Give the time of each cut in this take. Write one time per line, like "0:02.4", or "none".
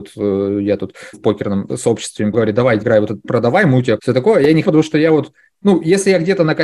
0:01.1
0:02.3
0:02.8
0:03.2
0:04.0
0:04.6